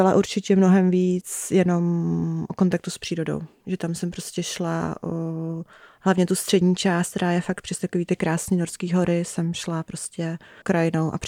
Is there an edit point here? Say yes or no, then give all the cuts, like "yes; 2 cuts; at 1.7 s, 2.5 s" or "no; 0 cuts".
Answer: no; 0 cuts